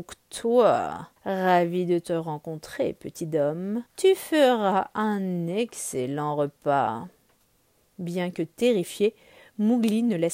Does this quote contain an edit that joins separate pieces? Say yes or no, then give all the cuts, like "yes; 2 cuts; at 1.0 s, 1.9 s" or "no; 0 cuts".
yes; 3 cuts; at 1.2 s, 3.9 s, 7.4 s